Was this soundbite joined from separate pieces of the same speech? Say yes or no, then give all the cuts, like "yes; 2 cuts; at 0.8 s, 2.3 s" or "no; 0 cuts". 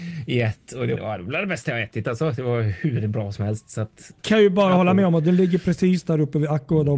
yes; 1 cut; at 1.0 s